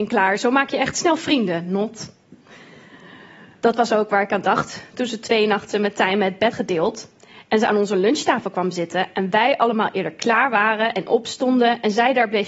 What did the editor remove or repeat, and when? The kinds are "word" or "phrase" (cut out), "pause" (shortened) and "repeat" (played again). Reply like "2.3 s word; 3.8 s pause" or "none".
6.5 s word